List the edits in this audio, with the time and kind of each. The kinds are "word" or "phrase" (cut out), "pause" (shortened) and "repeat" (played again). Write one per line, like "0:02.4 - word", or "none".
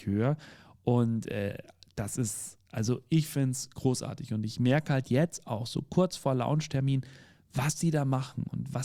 none